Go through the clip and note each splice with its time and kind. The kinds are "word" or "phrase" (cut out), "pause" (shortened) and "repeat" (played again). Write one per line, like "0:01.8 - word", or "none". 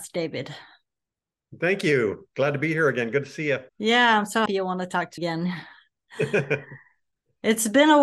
0:03.7 - pause
0:04.5 - word
0:05.2 - word